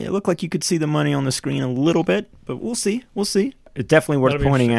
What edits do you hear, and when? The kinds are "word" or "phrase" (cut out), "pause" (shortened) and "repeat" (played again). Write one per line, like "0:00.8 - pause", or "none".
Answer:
0:02.6 - word